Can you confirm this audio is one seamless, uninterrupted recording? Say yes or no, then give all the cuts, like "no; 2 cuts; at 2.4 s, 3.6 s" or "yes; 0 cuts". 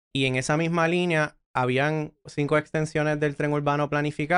no; 1 cut; at 2.3 s